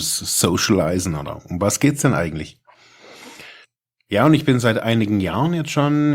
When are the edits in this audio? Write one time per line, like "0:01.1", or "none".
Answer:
0:03.6

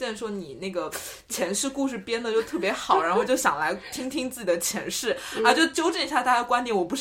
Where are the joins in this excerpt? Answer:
none

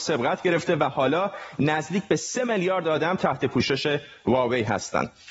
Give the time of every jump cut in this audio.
none

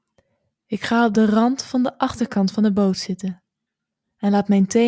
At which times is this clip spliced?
none

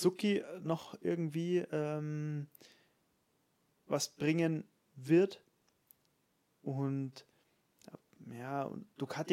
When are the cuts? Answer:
none

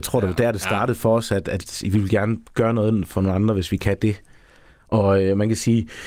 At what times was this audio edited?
none

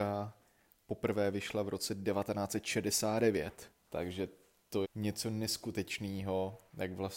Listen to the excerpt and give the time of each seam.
0:03.8
0:04.8

